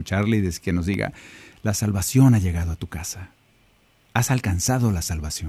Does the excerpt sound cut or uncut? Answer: uncut